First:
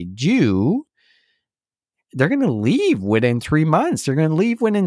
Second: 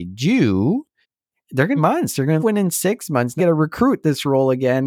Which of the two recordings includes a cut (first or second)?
second